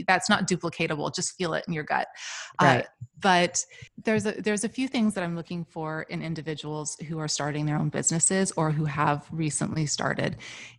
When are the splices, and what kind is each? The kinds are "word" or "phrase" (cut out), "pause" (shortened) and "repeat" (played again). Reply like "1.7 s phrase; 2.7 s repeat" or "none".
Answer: 3.1 s pause